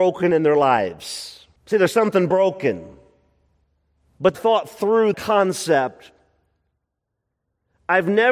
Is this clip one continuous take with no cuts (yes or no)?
no